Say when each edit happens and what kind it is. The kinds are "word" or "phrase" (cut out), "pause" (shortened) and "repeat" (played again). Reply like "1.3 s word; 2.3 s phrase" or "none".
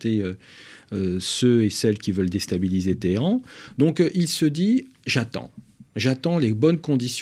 5.9 s pause